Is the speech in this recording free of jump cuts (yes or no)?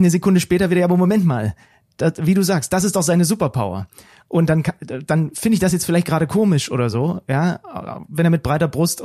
yes